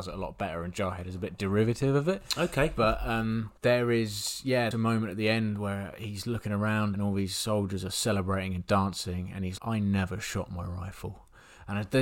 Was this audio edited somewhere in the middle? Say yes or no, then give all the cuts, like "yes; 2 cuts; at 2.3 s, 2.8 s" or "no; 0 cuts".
yes; 4 cuts; at 3.6 s, 4.7 s, 6.9 s, 9.6 s